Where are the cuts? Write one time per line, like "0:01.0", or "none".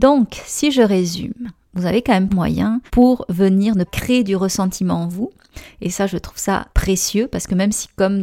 0:02.3
0:02.9
0:03.9
0:06.7